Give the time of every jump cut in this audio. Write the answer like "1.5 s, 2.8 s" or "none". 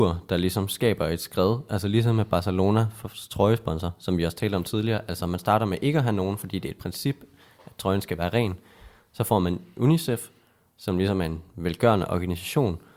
none